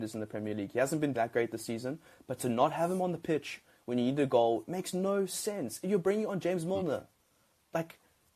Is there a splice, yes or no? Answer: yes